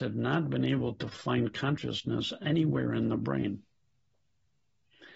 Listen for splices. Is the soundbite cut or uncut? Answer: uncut